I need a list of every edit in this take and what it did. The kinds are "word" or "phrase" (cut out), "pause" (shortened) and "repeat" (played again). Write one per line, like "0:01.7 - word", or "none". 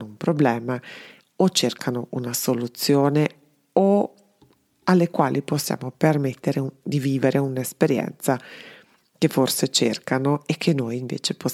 none